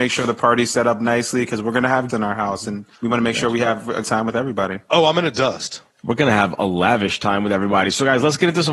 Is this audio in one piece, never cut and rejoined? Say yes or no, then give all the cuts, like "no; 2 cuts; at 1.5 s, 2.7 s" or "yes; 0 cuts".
no; 3 cuts; at 2.1 s, 2.9 s, 4.0 s